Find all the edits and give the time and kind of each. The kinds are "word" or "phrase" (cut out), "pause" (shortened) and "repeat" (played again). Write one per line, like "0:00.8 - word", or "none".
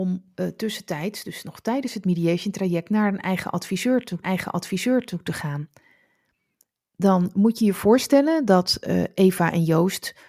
0:04.2 - repeat